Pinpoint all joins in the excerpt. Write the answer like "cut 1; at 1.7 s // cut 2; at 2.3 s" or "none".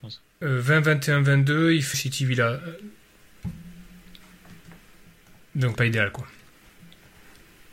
cut 1; at 1.9 s // cut 2; at 5.7 s